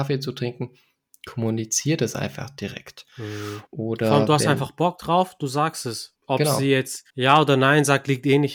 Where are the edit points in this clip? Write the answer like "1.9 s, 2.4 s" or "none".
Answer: 3.7 s, 6.2 s, 7.1 s